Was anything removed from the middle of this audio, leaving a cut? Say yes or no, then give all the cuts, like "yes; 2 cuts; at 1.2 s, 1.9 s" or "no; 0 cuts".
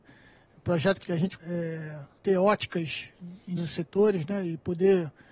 yes; 4 cuts; at 1.0 s, 1.4 s, 2.2 s, 3.6 s